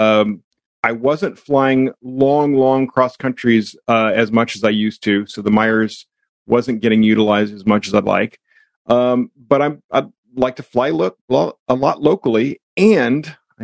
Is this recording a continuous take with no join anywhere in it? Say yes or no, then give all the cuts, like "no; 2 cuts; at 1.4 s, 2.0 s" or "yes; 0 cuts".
yes; 0 cuts